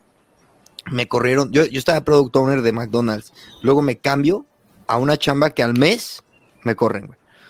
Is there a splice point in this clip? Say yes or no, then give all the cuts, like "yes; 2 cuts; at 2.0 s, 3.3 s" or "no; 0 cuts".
no; 0 cuts